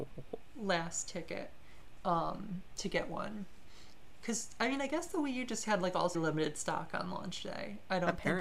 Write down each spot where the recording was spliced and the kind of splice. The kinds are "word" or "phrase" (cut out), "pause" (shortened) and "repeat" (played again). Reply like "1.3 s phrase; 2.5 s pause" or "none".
6.1 s word